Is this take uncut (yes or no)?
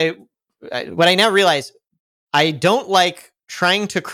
yes